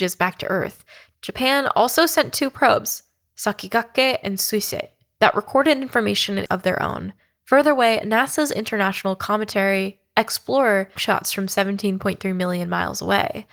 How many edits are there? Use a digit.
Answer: 2